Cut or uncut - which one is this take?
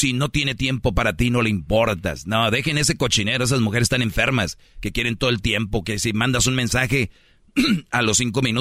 uncut